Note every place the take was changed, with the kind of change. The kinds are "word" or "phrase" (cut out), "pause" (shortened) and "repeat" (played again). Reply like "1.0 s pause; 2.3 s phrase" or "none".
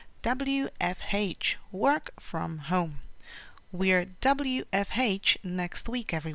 none